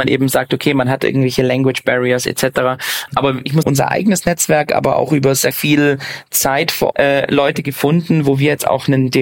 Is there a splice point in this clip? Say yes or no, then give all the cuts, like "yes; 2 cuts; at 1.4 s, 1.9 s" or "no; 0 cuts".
yes; 3 cuts; at 3.6 s, 5.5 s, 6.9 s